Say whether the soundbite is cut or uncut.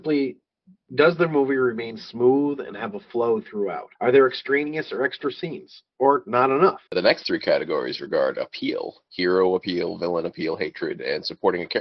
cut